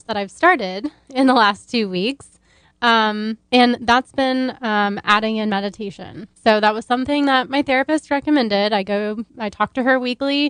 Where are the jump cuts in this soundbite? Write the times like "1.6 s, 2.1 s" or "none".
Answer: 3.4 s, 6.3 s, 9.3 s

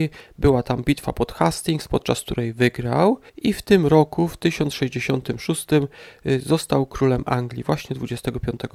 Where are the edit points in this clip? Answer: 3.3 s

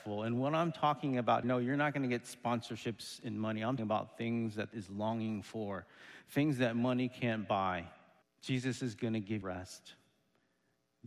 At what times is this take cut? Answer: 1.4 s, 3.8 s, 4.7 s, 8.2 s, 9.4 s

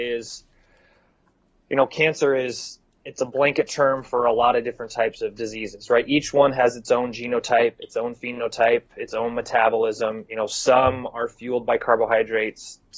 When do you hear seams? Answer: none

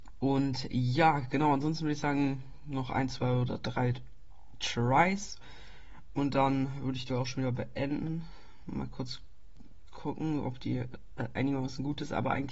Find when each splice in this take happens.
7.1 s

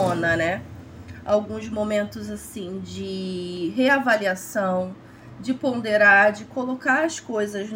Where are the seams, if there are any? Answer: none

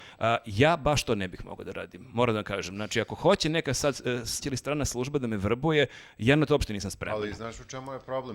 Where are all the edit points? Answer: 4.4 s

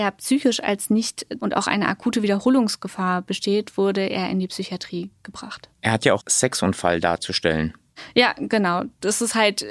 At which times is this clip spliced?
1.4 s, 5.7 s, 6.2 s

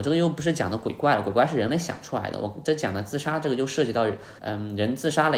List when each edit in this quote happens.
4.4 s

